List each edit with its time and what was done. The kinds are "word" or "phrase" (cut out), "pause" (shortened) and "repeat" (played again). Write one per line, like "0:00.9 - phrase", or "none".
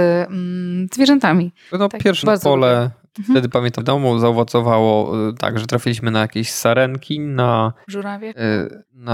0:02.2 - word
0:03.8 - word